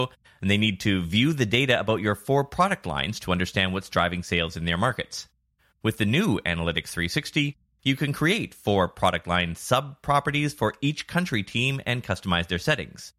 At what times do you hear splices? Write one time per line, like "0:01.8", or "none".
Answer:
none